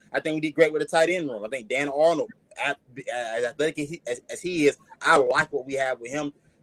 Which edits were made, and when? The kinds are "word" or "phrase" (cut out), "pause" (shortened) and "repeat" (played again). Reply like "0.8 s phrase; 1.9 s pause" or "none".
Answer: none